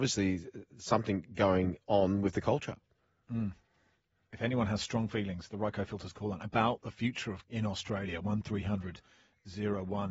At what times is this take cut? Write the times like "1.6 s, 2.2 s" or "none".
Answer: 7.4 s